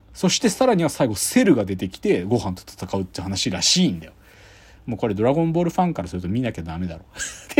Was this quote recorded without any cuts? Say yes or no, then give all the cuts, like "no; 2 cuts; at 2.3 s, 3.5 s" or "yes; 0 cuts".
yes; 0 cuts